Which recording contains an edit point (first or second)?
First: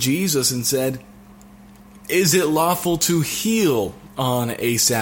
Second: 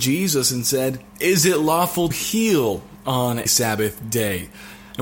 second